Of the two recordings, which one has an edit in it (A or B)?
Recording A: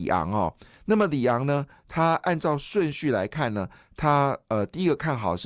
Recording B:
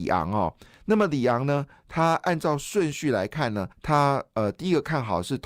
B